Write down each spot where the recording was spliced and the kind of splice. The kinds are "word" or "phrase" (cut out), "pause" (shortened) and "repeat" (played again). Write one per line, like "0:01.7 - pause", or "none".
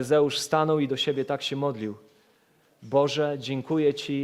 none